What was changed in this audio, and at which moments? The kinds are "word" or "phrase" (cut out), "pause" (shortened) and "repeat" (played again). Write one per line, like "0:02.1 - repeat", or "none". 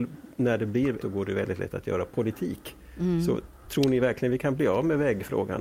0:01.0 - phrase

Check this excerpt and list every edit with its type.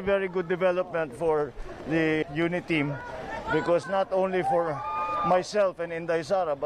0:02.2 - word
0:03.8 - phrase

